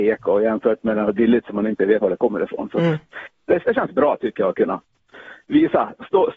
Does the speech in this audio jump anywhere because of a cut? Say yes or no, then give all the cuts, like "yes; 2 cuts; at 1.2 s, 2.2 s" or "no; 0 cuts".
yes; 2 cuts; at 2.0 s, 3.6 s